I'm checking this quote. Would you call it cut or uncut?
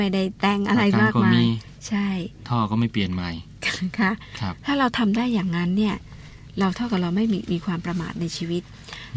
uncut